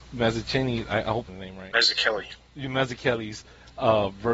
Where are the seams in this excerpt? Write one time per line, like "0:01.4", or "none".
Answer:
0:01.3